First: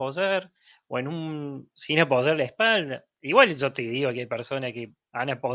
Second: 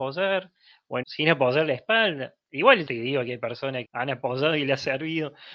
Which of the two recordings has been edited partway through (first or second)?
second